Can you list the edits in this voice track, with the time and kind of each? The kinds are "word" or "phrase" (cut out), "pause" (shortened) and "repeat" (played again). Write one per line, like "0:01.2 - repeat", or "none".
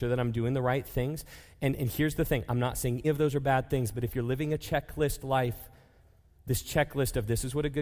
0:03.0 - word